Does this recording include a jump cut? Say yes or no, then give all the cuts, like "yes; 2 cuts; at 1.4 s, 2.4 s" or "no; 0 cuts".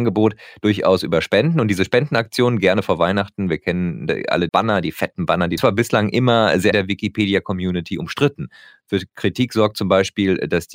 yes; 3 cuts; at 4.5 s, 5.6 s, 6.7 s